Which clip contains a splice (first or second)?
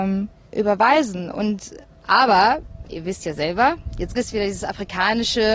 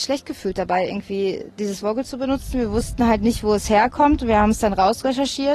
first